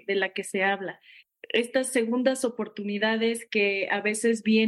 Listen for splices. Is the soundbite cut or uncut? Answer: uncut